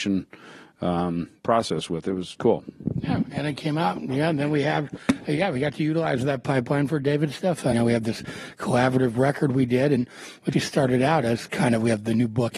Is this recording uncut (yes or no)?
no